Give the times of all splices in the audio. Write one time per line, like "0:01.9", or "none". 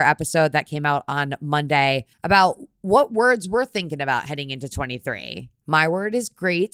0:02.1
0:05.6